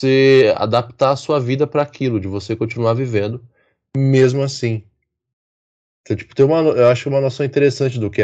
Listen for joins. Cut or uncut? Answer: uncut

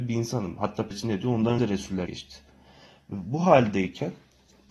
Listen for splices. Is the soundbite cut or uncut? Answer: cut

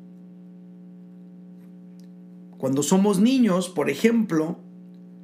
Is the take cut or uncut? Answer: uncut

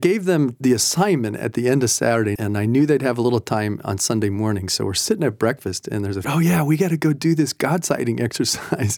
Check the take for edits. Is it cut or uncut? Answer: cut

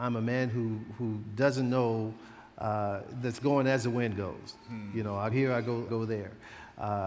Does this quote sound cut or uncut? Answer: cut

